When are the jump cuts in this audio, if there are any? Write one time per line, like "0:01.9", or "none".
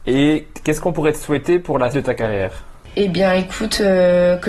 0:01.9